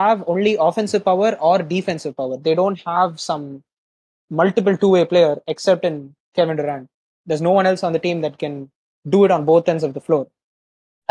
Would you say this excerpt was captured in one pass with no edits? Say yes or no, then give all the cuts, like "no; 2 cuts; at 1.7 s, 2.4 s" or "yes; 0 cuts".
yes; 0 cuts